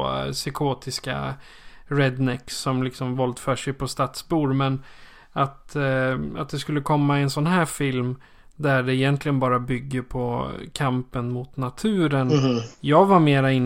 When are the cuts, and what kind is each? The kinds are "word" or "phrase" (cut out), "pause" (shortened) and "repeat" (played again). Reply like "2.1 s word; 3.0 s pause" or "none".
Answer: none